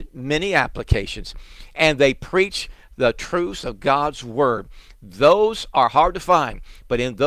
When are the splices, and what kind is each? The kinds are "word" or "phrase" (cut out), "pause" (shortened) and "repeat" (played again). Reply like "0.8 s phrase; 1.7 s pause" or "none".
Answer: none